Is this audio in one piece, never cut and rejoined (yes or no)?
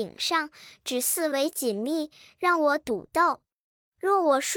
yes